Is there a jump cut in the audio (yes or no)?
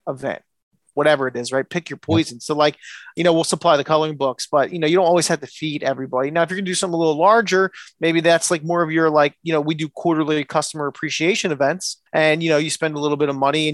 yes